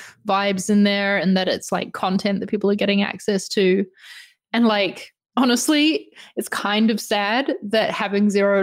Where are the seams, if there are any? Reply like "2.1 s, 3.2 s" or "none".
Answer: none